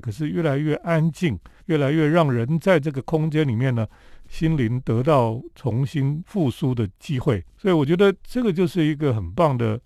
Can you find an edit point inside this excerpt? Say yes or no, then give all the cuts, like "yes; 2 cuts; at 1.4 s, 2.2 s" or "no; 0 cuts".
yes; 2 cuts; at 1.6 s, 7.5 s